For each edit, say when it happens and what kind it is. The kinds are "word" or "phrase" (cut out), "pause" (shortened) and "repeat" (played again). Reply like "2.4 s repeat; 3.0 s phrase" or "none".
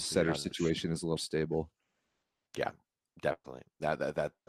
1.2 s word